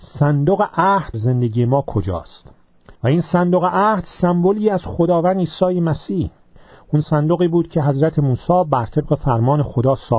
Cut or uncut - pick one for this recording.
cut